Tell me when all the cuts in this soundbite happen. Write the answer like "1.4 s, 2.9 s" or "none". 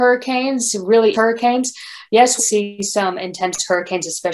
1.1 s, 2.4 s